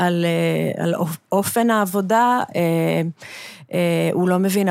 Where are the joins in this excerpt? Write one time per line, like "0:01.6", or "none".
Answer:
none